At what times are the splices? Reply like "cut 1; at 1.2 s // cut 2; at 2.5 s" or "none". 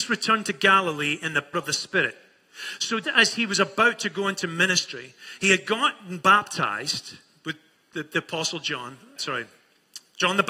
cut 1; at 1.5 s // cut 2; at 3.0 s // cut 3; at 9.2 s